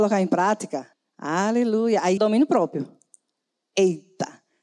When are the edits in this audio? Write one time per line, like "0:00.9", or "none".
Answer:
0:00.9
0:02.2